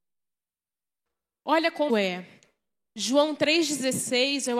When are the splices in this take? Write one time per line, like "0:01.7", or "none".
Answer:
0:01.9